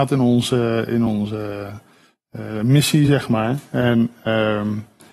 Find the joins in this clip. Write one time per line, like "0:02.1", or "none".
none